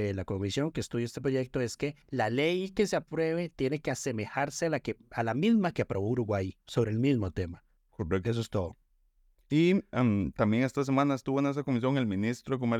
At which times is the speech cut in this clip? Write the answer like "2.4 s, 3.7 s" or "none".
2.0 s

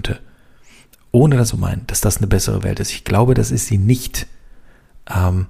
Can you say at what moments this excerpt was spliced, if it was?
1.5 s

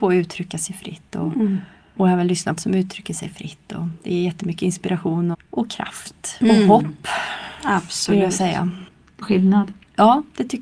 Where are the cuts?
2.6 s, 5.3 s, 9.2 s

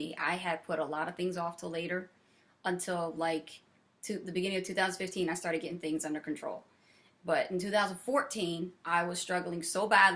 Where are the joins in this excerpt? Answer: none

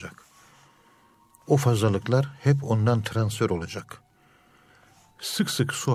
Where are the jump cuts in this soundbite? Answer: none

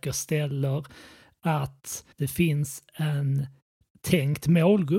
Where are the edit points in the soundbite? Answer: 2.1 s

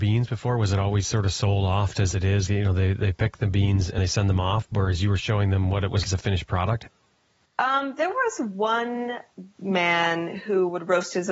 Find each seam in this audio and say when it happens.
1.9 s, 2.5 s, 4.0 s, 6.0 s

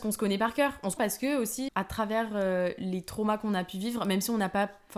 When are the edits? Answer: 1.0 s, 1.7 s

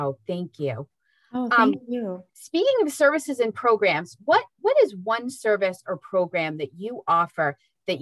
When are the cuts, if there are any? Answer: 2.3 s

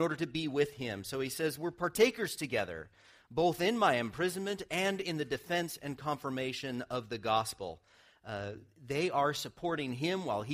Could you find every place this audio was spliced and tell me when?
none

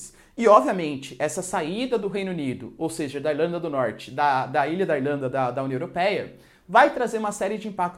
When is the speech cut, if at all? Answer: none

